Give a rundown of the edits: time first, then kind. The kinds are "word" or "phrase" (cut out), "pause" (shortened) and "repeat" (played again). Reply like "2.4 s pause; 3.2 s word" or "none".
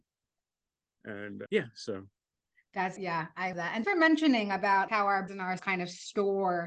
1.5 s word; 3.0 s word; 3.5 s word; 3.8 s word; 4.9 s word; 5.3 s word; 5.6 s word